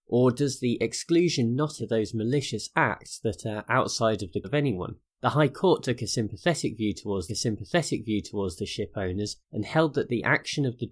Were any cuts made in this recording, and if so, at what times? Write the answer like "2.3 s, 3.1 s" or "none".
1.8 s, 4.4 s, 5.1 s, 7.3 s, 9.4 s